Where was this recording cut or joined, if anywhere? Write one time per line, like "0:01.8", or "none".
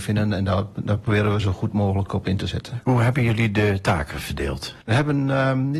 0:04.8